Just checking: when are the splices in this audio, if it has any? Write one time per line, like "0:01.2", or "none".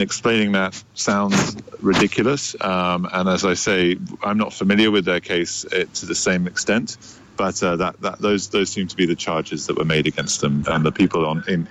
none